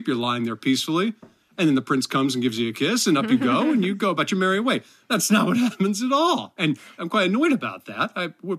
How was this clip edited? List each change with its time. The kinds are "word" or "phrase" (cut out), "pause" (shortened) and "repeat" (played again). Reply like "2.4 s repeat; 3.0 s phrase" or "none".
none